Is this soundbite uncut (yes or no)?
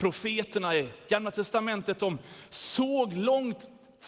yes